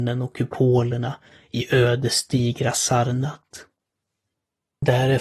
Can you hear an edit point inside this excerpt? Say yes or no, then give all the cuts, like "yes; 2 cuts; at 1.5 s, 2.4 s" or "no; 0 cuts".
no; 0 cuts